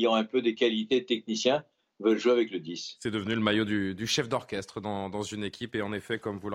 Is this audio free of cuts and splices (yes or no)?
yes